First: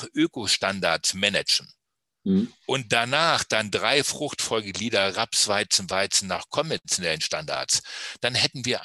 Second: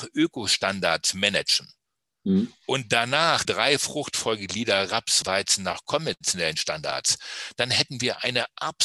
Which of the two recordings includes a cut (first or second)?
second